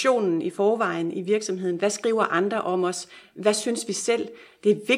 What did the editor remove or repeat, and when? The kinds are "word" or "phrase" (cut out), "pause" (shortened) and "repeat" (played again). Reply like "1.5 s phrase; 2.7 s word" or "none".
none